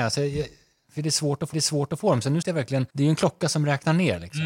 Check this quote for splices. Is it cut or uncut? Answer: cut